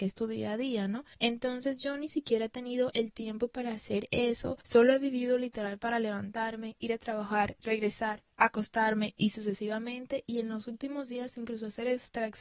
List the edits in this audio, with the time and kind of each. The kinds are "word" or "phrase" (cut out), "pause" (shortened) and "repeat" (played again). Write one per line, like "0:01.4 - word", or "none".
0:01.1 - pause
0:04.6 - pause